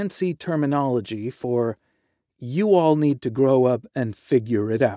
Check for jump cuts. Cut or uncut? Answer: uncut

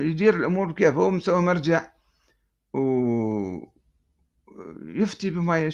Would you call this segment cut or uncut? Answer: uncut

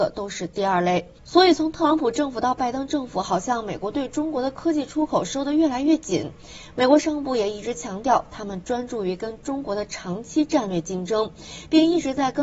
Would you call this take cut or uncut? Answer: cut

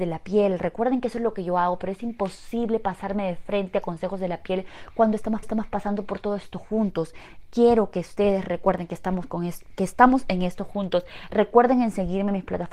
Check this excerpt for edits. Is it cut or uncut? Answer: cut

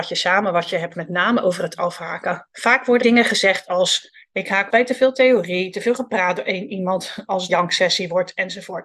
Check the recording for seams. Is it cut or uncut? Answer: cut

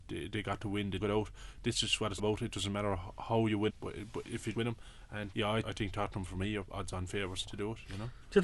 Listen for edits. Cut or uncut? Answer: cut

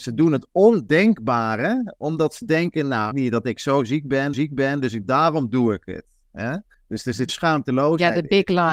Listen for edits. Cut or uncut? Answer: cut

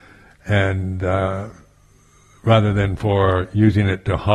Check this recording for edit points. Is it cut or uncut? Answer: uncut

